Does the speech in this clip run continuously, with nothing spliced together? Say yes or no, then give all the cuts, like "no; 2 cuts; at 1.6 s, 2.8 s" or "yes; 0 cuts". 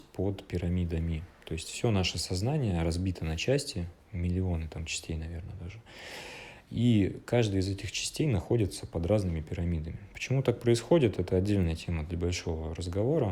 no; 1 cut; at 4.0 s